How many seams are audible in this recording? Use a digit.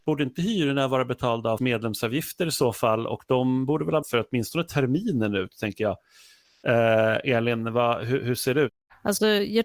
2